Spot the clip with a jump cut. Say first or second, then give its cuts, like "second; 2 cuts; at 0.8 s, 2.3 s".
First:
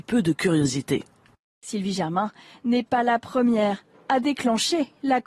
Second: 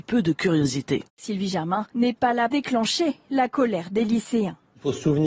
second; 3 cuts; at 1.1 s, 1.9 s, 2.5 s